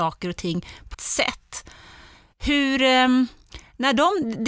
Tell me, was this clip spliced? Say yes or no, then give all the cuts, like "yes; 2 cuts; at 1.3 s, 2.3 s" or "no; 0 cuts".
yes; 1 cut; at 0.9 s